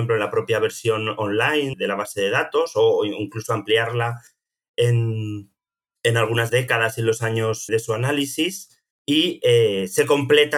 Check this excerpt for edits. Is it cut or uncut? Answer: cut